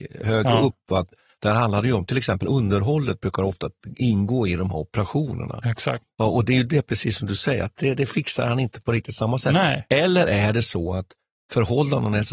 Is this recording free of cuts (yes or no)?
yes